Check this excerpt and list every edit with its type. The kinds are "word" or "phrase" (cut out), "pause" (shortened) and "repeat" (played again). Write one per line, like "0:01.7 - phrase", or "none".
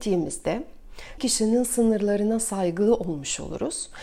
0:01.2 - word